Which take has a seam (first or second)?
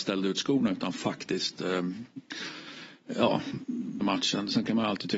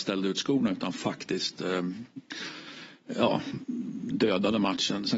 first